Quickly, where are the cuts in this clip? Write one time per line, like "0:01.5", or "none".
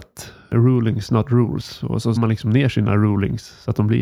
0:02.2